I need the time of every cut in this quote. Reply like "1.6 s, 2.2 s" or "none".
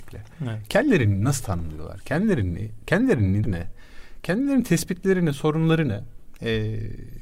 3.4 s